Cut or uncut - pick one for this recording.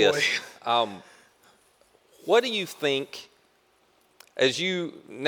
uncut